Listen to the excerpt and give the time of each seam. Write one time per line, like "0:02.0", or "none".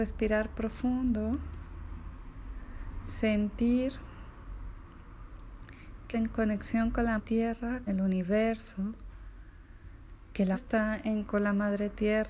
0:06.1
0:07.2
0:07.9
0:10.5
0:11.2